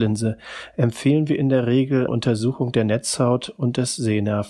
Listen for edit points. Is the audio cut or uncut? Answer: cut